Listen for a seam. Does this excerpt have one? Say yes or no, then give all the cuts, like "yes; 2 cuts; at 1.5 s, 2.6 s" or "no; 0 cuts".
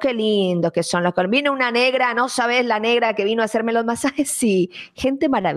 no; 0 cuts